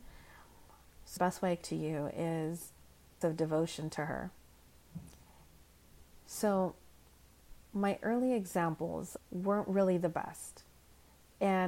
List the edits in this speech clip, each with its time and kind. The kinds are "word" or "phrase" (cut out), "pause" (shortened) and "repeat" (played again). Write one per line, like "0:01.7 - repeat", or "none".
0:01.2 - word
0:01.6 - word
0:03.2 - word
0:07.6 - pause
0:09.2 - phrase